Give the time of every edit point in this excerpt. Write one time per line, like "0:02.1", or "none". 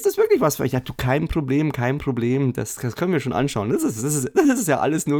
none